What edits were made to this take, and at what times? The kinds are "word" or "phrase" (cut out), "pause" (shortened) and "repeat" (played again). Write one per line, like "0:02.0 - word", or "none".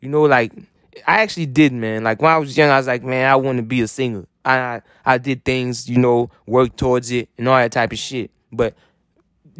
none